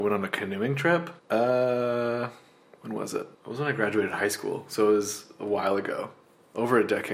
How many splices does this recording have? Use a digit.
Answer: 2